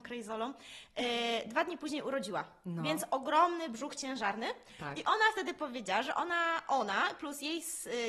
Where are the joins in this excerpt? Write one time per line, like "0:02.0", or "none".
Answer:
none